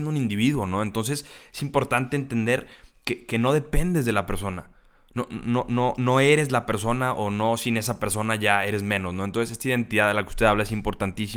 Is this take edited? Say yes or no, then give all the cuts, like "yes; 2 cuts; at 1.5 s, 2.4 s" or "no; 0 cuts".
no; 0 cuts